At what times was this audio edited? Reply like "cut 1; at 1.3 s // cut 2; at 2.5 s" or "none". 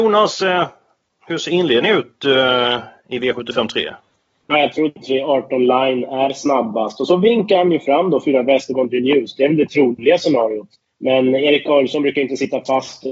none